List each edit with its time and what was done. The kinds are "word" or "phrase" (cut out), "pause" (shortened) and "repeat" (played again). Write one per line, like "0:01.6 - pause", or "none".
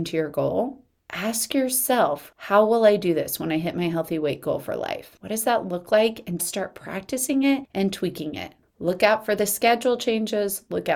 0:06.4 - word

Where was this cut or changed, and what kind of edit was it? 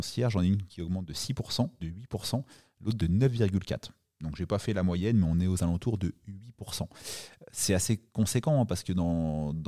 0:01.8 - word

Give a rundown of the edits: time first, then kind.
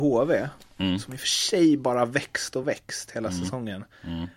none

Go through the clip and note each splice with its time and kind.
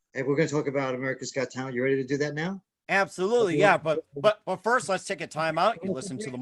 none

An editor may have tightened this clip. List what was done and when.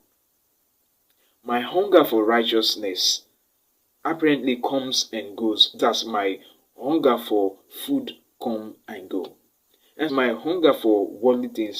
0:05.8 - word
0:10.1 - word

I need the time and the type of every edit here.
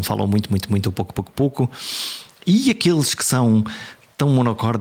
none

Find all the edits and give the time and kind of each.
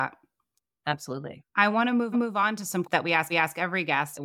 0:01.5 - pause
0:02.1 - repeat
0:02.8 - word
0:03.3 - repeat

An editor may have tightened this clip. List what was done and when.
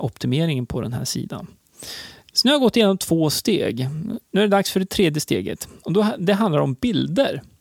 0:04.2 - pause

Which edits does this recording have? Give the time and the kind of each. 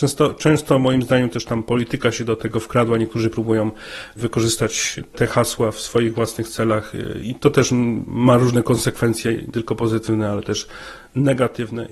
0:05.1 - word
0:07.2 - word
0:09.5 - word

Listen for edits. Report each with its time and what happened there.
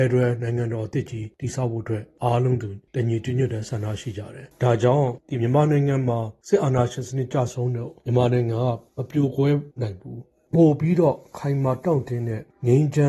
0:09.7 - pause

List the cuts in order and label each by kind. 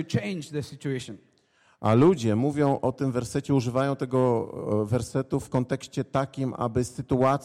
none

